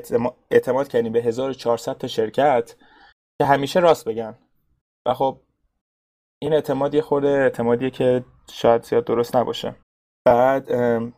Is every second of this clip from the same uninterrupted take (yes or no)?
yes